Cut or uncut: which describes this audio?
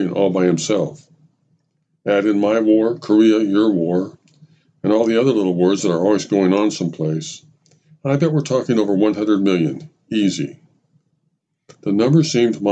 uncut